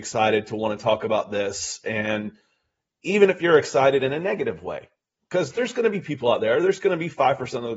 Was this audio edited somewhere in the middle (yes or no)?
no